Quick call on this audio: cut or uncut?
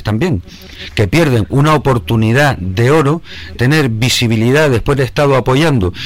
cut